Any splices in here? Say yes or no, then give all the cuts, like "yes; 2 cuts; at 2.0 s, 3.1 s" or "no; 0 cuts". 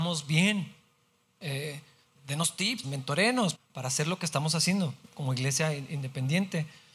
yes; 3 cuts; at 2.2 s, 2.8 s, 3.5 s